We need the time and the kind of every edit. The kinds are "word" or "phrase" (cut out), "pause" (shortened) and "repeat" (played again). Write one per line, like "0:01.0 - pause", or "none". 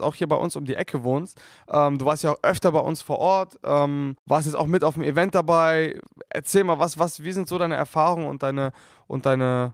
0:04.2 - pause